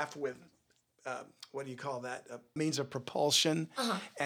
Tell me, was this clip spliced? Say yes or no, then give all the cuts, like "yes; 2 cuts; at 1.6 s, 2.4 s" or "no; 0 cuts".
yes; 1 cut; at 2.6 s